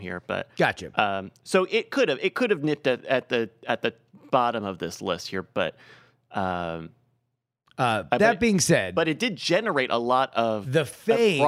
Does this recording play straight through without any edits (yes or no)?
yes